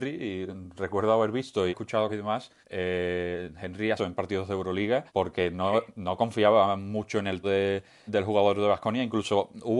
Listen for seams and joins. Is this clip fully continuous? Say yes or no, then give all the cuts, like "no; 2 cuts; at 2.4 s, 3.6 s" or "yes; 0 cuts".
no; 7 cuts; at 1.7 s, 2.1 s, 2.6 s, 4.0 s, 5.1 s, 7.4 s, 8.1 s